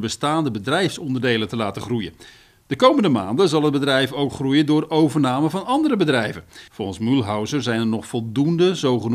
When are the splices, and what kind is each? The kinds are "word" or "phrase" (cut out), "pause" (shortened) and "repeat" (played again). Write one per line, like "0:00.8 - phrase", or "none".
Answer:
0:06.7 - pause